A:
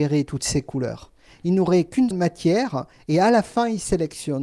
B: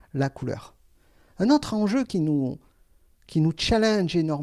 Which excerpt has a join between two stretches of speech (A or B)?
A